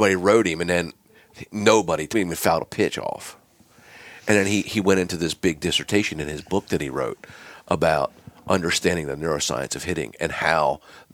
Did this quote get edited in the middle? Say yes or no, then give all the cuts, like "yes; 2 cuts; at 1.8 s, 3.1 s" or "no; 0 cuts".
yes; 1 cut; at 2.1 s